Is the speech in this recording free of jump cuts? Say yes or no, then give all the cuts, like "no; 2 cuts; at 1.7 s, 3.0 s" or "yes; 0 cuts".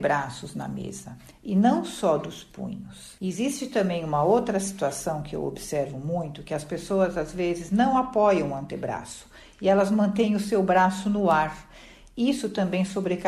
yes; 0 cuts